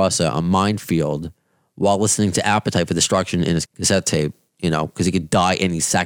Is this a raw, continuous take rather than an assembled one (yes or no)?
no